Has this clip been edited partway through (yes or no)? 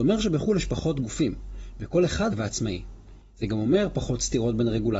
yes